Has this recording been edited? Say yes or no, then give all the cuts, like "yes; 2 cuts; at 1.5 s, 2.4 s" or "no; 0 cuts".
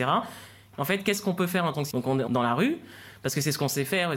yes; 2 cuts; at 1.9 s, 2.3 s